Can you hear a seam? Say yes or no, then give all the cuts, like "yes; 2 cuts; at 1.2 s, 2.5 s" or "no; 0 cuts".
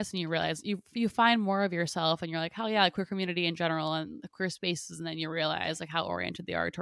no; 0 cuts